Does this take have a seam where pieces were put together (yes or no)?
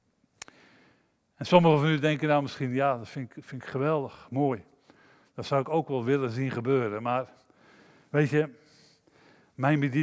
no